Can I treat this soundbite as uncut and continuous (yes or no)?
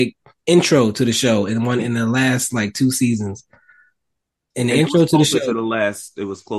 yes